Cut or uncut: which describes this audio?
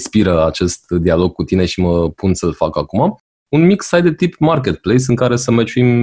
uncut